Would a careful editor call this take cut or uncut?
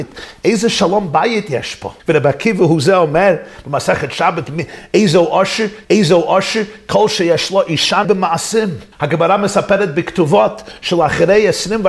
cut